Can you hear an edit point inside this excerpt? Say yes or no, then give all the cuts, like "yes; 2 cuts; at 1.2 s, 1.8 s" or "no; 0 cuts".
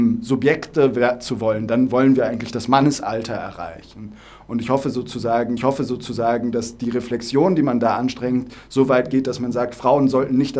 yes; 1 cut; at 5.6 s